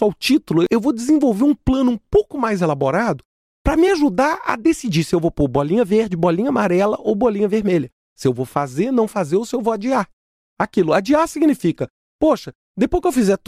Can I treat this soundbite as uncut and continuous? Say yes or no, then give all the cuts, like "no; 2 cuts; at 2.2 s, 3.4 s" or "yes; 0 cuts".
yes; 0 cuts